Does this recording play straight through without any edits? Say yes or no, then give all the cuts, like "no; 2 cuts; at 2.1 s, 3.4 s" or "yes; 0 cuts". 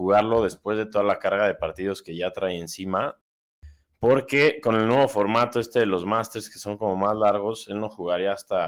yes; 0 cuts